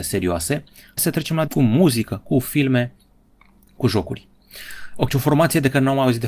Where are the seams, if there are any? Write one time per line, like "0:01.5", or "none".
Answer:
0:01.0
0:01.5
0:05.1